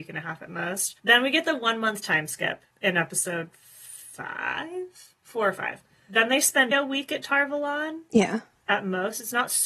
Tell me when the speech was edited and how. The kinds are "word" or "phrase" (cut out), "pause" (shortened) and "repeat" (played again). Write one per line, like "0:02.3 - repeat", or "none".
0:01.0 - pause
0:02.7 - pause
0:06.7 - word